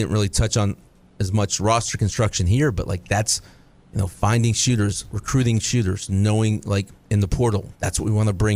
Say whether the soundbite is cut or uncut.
uncut